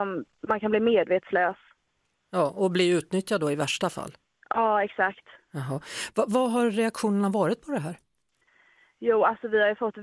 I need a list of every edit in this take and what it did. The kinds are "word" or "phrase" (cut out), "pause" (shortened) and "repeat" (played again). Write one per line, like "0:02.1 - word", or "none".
none